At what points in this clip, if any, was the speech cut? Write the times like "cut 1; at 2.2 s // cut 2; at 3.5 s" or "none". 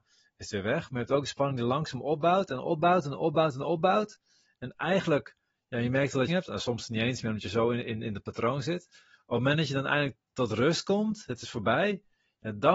cut 1; at 6.3 s